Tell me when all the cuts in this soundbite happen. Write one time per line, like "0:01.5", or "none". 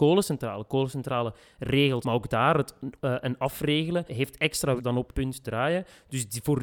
0:02.0
0:03.0
0:04.1
0:04.8
0:05.1
0:05.4